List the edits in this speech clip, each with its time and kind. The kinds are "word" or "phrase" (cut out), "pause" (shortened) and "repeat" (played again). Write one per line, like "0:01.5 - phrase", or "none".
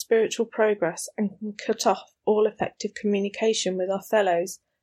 none